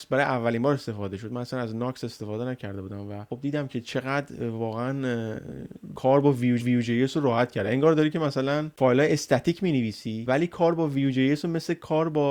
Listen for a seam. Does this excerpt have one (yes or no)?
yes